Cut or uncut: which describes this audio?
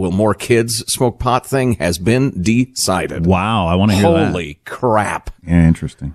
uncut